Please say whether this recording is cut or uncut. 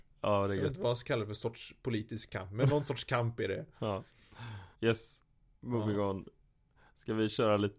cut